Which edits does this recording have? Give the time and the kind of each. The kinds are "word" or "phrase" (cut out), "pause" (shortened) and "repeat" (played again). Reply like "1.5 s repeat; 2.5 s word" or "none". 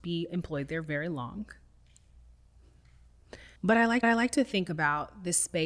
3.6 s pause; 4.0 s repeat